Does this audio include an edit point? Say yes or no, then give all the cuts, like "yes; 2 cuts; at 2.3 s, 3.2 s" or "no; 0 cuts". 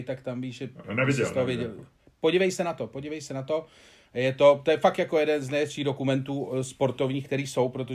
no; 0 cuts